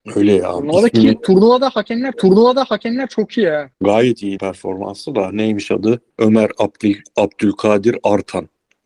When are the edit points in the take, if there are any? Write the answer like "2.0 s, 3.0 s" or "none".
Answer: 2.1 s, 3.7 s, 4.4 s, 6.1 s